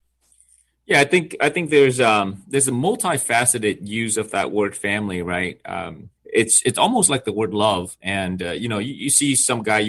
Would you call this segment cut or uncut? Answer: cut